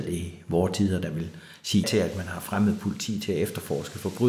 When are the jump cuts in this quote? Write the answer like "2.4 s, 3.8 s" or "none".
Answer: 1.8 s